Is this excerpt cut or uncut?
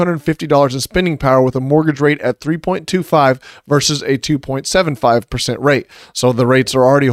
uncut